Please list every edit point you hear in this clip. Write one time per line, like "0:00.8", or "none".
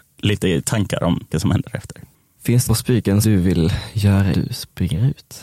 0:01.3
0:02.7
0:03.2
0:04.3

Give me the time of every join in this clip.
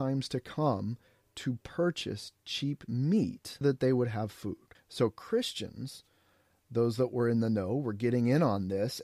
0:03.6

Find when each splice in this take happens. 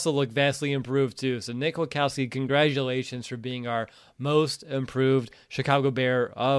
none

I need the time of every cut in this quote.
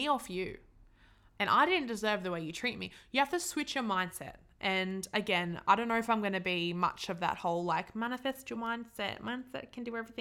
none

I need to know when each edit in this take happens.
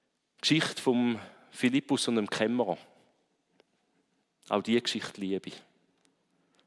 none

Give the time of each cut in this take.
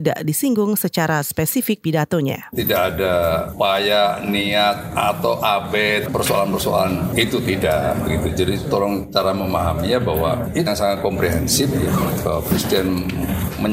0:01.8
0:06.1
0:10.7

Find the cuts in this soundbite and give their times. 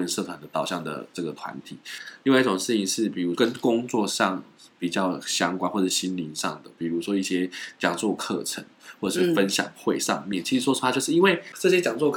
none

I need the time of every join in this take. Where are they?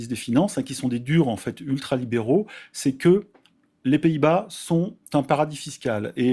none

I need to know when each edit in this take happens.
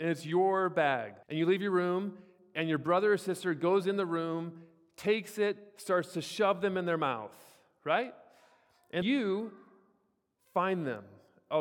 0:01.2
0:09.0

